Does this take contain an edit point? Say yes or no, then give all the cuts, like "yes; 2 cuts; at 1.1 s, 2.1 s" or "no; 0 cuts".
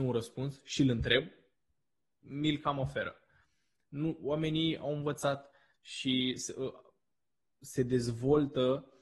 no; 0 cuts